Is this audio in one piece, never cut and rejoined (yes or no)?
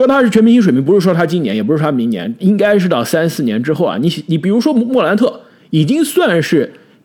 yes